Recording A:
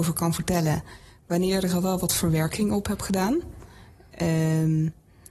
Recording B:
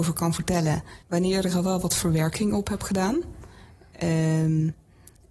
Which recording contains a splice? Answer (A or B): B